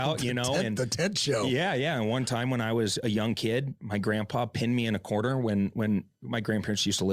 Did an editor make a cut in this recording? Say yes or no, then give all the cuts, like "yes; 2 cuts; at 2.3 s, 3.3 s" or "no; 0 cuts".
no; 0 cuts